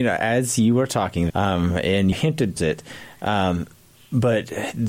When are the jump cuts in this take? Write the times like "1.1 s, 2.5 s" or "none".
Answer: 1.3 s, 2.1 s, 2.6 s